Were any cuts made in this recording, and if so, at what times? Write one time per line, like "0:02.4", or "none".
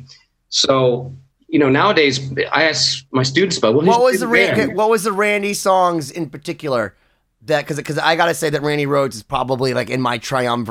none

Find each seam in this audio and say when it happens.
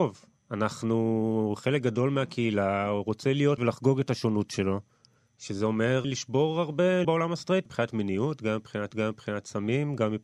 0:03.6
0:05.2
0:06.0
0:07.0
0:07.7
0:08.9

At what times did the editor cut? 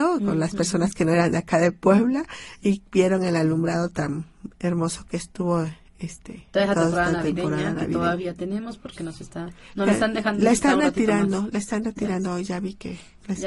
none

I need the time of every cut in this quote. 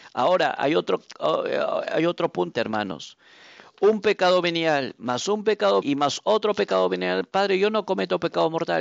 0:02.5
0:05.8

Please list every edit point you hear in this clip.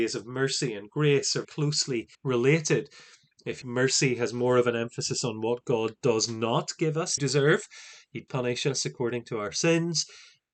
0:01.4
0:02.1
0:03.6
0:07.2
0:08.3

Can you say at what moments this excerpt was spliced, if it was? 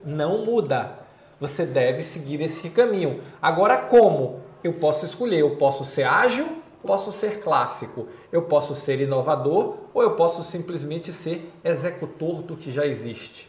0:06.9

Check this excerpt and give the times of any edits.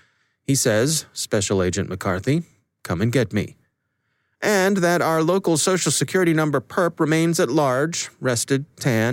none

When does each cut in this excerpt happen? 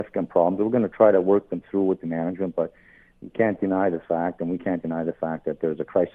none

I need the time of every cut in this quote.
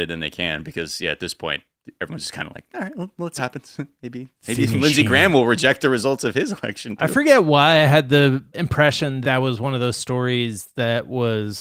0:03.4
0:08.5
0:09.2

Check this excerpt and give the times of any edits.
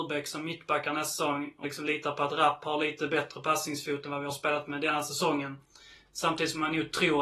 0:01.6

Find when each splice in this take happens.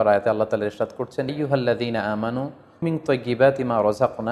0:01.3
0:02.8

